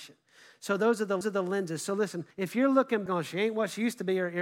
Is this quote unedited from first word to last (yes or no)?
no